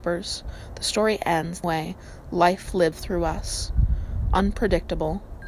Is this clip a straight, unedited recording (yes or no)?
no